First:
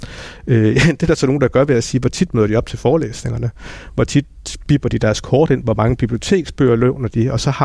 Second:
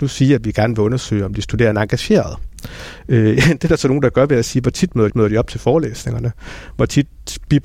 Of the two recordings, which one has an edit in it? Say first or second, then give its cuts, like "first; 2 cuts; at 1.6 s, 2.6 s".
second; 1 cut; at 5.1 s